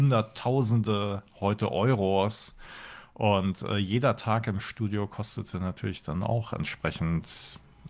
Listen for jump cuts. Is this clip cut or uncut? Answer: uncut